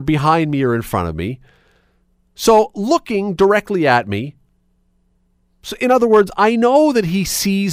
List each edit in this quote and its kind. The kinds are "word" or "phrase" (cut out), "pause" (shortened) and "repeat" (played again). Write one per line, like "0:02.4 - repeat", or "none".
none